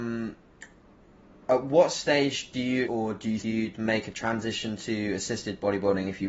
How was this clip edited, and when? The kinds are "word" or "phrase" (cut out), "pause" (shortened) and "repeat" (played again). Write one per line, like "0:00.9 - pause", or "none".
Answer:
0:02.9 - word
0:03.4 - word